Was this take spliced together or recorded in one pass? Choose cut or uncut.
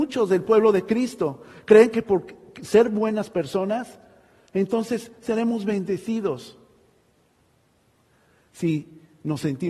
uncut